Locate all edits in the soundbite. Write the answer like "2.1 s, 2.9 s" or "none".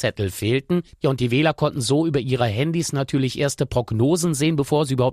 none

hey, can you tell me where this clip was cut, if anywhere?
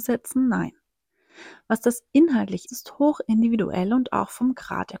2.7 s

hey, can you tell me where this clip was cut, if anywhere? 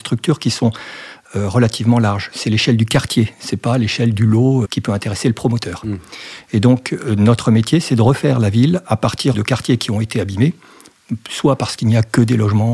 4.6 s, 9.3 s

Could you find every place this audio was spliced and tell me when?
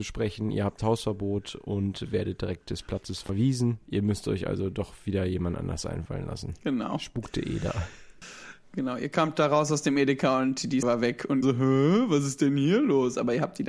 3.8 s, 10.8 s, 11.4 s

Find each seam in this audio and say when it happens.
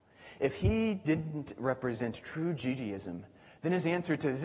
none

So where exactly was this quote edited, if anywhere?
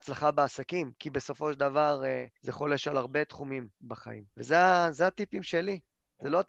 2.3 s, 4.3 s

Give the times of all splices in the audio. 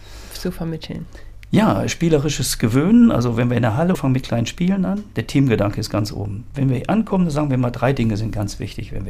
3.9 s

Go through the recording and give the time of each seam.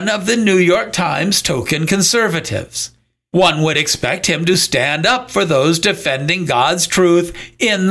none

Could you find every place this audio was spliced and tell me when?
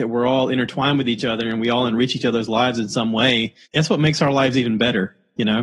3.6 s

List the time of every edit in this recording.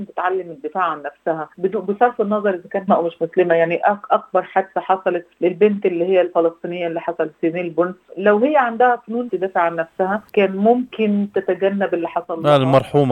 1.5 s, 2.9 s, 5.3 s, 9.3 s, 10.3 s

